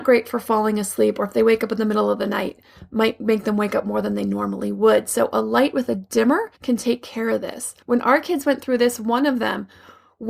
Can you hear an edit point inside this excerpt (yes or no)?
yes